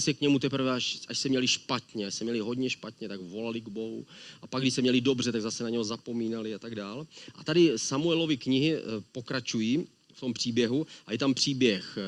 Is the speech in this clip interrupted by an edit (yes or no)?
no